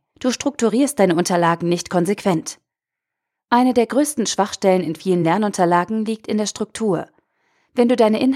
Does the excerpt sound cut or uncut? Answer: uncut